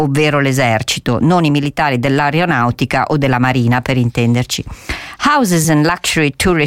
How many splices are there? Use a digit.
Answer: 0